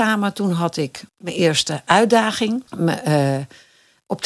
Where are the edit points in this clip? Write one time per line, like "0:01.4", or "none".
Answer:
0:01.1
0:02.7